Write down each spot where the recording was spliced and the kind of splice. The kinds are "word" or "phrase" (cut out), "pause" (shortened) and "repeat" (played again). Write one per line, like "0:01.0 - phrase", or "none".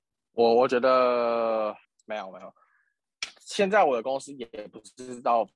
0:01.8 - pause